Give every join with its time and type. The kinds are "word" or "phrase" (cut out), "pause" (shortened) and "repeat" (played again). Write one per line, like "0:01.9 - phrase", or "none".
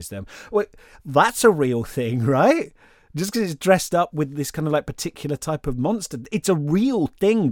none